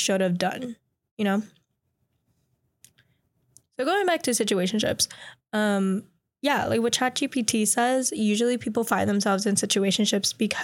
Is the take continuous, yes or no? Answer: yes